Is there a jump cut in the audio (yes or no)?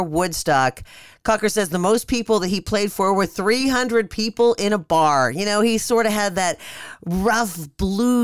no